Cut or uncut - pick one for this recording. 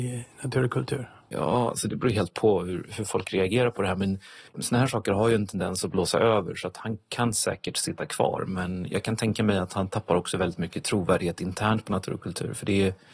cut